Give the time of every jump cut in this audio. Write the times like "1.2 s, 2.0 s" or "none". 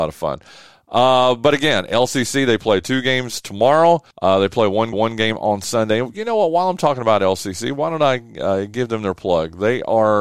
4.1 s, 4.9 s

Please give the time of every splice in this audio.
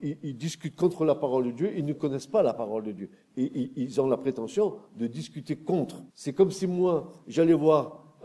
6.1 s

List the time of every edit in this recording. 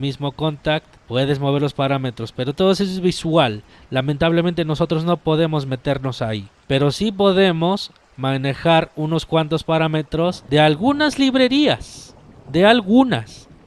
1.0 s

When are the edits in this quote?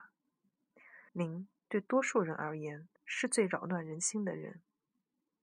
1.1 s, 3.0 s

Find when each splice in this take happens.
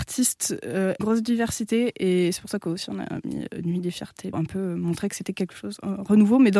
1.0 s, 4.3 s

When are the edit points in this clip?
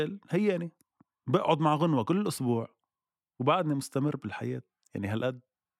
none

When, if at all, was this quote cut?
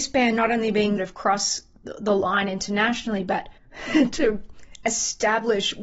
1.0 s, 3.6 s

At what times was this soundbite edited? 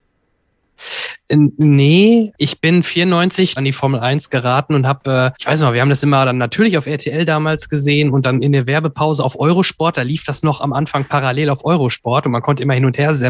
2.3 s, 3.6 s, 5.3 s

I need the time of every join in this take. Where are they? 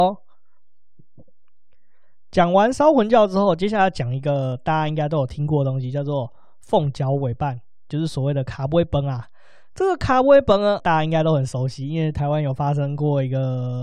10.8 s

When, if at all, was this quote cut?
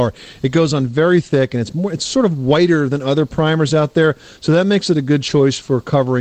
none

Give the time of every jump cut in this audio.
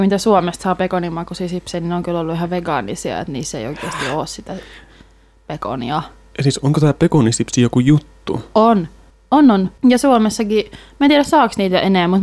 9.1 s, 9.8 s

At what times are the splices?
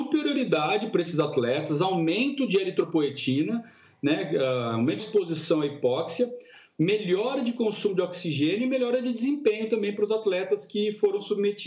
5.0 s

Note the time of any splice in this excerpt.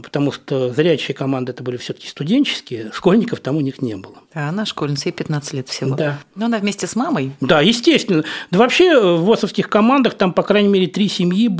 4.2 s

